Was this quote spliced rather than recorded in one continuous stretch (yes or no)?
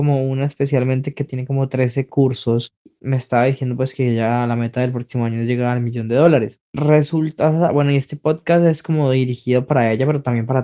no